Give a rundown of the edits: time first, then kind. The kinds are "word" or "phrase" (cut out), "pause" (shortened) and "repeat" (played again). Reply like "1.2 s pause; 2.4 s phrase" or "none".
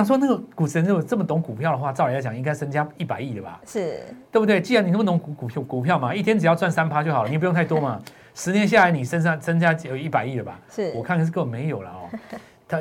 7.3 s word